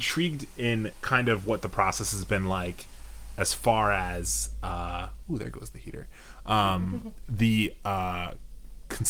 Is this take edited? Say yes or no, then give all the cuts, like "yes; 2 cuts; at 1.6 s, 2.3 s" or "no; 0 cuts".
no; 0 cuts